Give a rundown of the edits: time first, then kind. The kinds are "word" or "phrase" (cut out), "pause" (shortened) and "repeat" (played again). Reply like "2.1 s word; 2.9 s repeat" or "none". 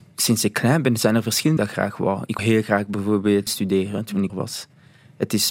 1.6 s phrase; 2.4 s word; 3.5 s word; 4.3 s word